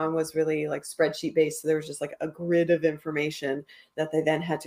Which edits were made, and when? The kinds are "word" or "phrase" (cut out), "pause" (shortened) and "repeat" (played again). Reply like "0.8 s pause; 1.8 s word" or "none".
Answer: none

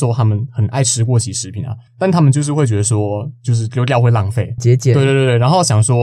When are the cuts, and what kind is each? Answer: 1.9 s pause; 4.6 s word

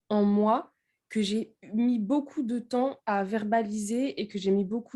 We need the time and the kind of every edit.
none

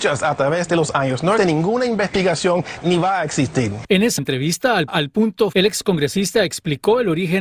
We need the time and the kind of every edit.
1.4 s word; 2.8 s word; 4.2 s word; 4.9 s word; 5.5 s word

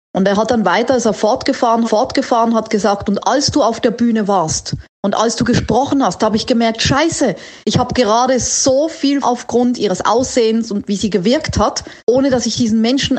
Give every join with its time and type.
1.8 s repeat; 7.6 s pause; 9.2 s phrase; 12.0 s pause

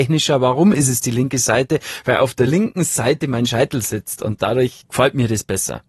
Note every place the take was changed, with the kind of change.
none

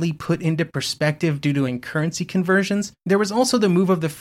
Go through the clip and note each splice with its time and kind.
1.7 s word; 3.0 s pause

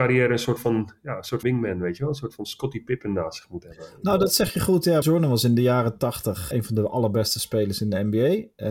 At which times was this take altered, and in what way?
1.4 s word; 5.0 s word; 6.5 s word

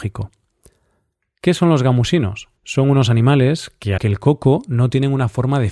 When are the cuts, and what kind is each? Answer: 2.6 s pause; 4.0 s word

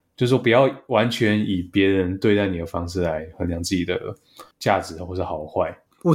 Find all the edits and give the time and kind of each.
4.5 s pause

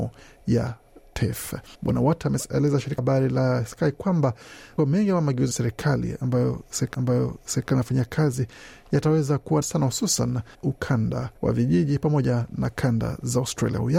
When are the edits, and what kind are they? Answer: 1.7 s pause; 3.0 s word; 4.8 s word; 5.5 s phrase; 6.9 s repeat; 9.6 s phrase; 10.5 s word; 11.4 s pause

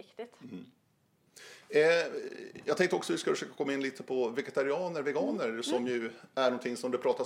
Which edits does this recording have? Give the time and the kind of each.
none

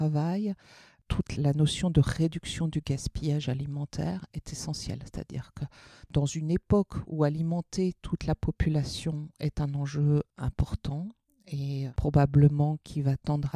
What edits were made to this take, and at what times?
none

